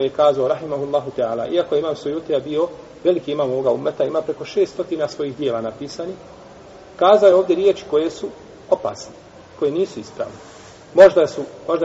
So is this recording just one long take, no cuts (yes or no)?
yes